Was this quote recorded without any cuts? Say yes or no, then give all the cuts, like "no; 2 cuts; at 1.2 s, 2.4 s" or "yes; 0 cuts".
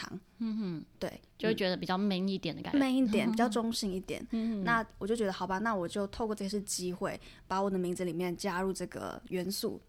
no; 2 cuts; at 1.3 s, 2.7 s